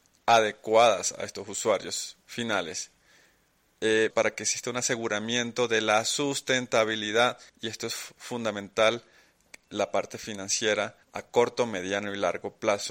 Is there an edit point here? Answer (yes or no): yes